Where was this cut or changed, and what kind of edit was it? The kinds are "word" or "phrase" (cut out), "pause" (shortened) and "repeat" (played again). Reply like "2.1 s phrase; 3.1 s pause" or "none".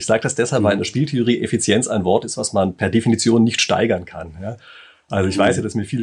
none